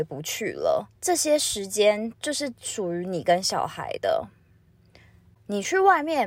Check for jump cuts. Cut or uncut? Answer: cut